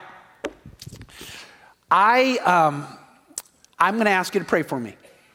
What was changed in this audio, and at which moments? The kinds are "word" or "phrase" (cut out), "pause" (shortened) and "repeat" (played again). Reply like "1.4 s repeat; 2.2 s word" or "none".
none